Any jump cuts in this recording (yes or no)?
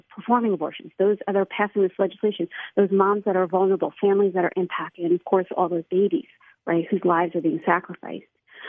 no